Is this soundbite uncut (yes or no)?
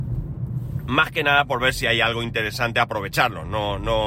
yes